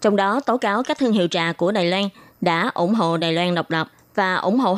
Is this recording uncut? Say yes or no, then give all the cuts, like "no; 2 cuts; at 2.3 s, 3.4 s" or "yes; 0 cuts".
yes; 0 cuts